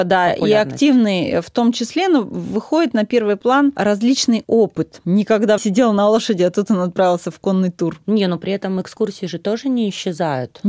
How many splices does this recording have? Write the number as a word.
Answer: one